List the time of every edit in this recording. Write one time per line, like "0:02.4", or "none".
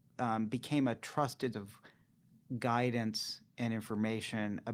0:01.5